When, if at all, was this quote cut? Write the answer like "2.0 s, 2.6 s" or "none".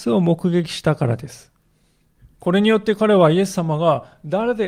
2.2 s